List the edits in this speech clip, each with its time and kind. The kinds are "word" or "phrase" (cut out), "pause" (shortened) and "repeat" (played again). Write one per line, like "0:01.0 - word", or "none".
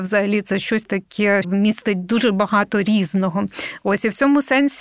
0:01.4 - word